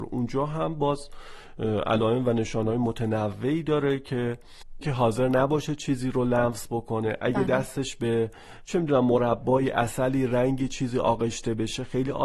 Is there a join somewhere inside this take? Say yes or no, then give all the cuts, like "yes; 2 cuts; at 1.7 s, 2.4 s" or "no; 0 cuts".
yes; 1 cut; at 4.8 s